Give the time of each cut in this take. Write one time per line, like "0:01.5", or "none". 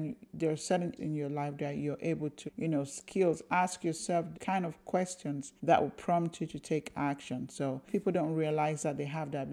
0:01.0
0:02.5
0:04.3
0:05.6
0:07.9